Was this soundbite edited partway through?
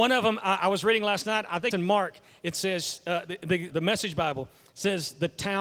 yes; 2 cuts; at 1.7 s, 3.7 s

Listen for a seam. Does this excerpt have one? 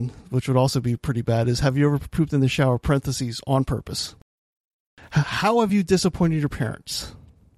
no; 0 cuts

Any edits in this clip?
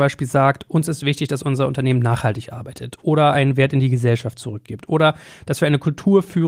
no; 0 cuts

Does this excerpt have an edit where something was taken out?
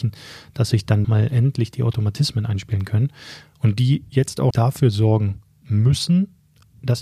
yes; 2 cuts; at 1.0 s, 4.5 s

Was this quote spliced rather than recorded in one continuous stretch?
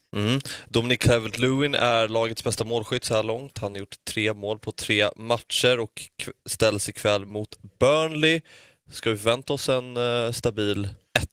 no; 0 cuts

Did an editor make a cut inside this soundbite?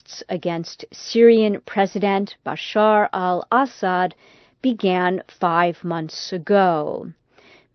no; 0 cuts

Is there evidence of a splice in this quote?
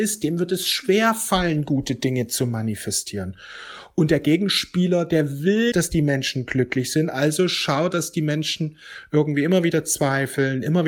yes; 2 cuts; at 5.7 s, 7.9 s

